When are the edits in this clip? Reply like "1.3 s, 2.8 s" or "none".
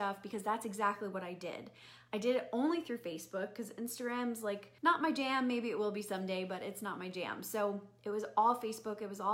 4.8 s